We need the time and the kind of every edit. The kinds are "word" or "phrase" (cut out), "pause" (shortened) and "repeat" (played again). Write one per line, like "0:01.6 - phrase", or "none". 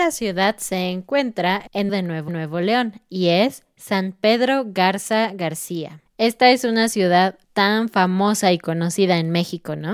0:01.9 - phrase
0:02.3 - repeat
0:07.4 - pause